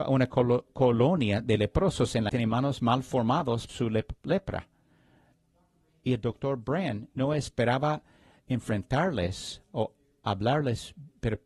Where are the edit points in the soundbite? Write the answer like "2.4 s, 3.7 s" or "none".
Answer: 2.3 s, 3.7 s